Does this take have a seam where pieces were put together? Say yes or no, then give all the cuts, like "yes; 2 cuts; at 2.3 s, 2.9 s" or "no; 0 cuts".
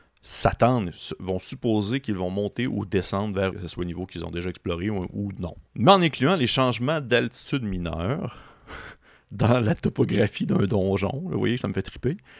yes; 2 cuts; at 3.5 s, 5.7 s